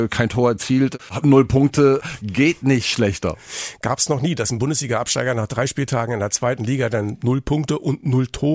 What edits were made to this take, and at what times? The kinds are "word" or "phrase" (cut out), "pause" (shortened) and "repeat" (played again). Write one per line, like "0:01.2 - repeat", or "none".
none